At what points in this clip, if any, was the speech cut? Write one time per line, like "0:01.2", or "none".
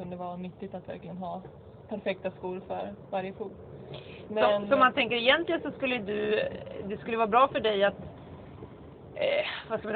none